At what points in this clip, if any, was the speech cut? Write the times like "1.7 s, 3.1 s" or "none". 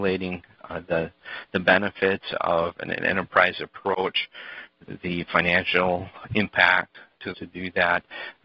7.3 s